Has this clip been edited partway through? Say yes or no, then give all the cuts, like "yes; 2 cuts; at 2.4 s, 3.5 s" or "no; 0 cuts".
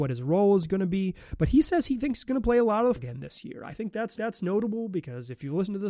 yes; 2 cuts; at 3.0 s, 4.2 s